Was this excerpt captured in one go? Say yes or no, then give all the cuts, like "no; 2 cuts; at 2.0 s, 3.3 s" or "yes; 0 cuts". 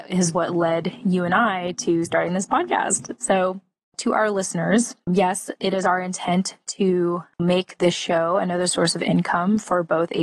yes; 0 cuts